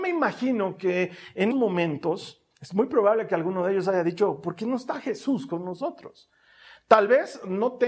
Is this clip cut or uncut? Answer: cut